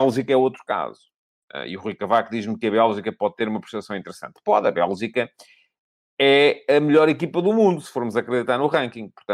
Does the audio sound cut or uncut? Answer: uncut